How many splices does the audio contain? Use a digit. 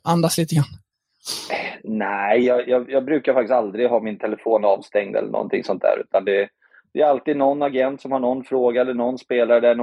0